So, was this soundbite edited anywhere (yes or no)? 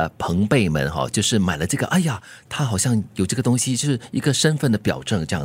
no